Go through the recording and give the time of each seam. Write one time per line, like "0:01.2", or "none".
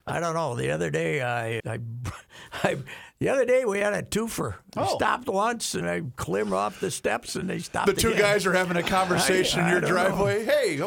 0:01.6
0:05.8
0:07.4